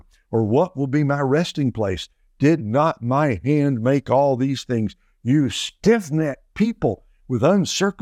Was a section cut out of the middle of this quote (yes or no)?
no